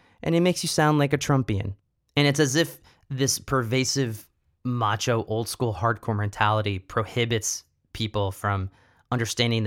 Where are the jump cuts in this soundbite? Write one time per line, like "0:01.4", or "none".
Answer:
none